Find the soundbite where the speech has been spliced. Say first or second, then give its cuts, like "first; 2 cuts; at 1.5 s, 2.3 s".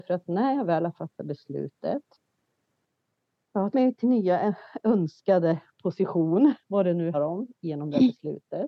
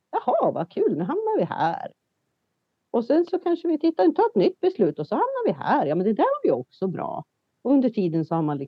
first; 3 cuts; at 3.7 s, 4.0 s, 7.1 s